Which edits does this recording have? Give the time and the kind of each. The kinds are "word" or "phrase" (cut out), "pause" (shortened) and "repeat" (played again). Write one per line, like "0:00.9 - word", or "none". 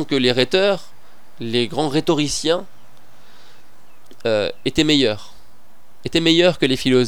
none